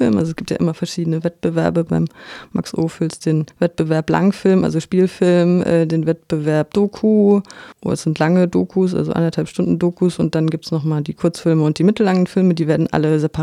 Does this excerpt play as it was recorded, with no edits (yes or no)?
no